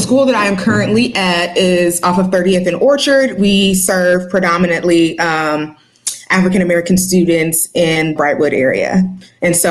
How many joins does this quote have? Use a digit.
1